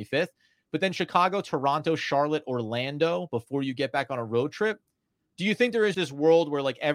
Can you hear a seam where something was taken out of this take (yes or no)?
yes